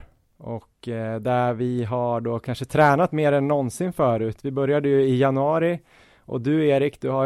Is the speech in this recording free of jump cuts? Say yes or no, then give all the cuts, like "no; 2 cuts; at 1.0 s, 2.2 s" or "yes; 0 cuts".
yes; 0 cuts